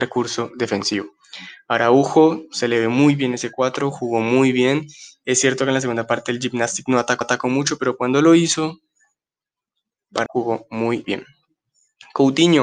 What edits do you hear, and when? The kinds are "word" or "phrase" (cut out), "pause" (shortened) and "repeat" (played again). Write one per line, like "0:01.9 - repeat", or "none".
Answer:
0:07.2 - repeat
0:10.3 - phrase
0:11.0 - word